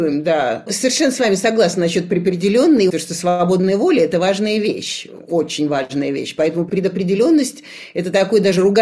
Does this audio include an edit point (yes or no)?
no